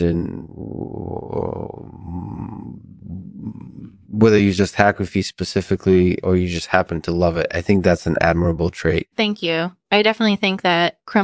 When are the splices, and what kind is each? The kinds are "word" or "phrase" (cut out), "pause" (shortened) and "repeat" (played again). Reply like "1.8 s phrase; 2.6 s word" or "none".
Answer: 9.1 s pause